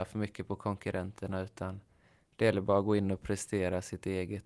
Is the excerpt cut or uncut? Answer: uncut